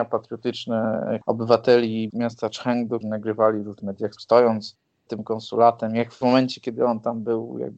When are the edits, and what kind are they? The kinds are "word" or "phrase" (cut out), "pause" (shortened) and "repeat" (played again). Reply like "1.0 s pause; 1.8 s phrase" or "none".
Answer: 1.2 s word; 2.1 s word; 3.0 s word; 3.8 s word; 4.2 s word; 5.1 s word; 6.2 s word